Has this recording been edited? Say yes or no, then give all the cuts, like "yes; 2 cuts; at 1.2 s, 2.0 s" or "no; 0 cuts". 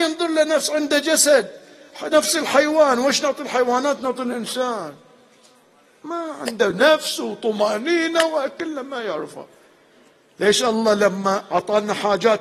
no; 0 cuts